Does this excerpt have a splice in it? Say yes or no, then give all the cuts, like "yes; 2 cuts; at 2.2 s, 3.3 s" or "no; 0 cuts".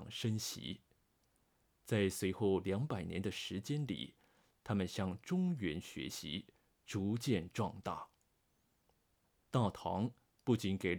no; 0 cuts